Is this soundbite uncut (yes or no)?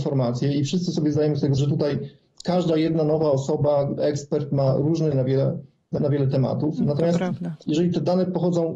no